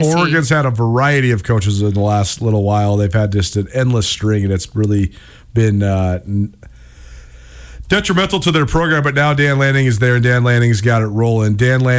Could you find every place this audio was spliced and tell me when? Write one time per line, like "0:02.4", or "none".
none